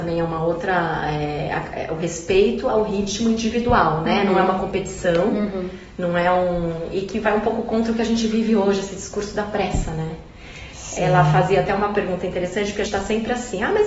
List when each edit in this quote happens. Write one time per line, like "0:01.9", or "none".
0:12.9